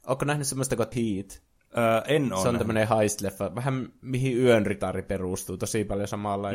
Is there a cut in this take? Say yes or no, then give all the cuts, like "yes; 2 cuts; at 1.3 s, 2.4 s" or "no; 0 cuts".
no; 0 cuts